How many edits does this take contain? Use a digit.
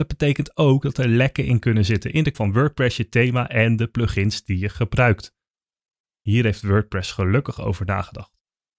1